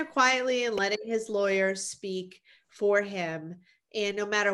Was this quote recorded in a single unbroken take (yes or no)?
yes